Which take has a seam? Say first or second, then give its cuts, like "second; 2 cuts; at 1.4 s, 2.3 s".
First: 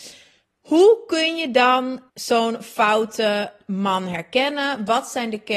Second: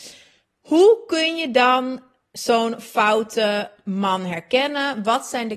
first; 1 cut; at 2.1 s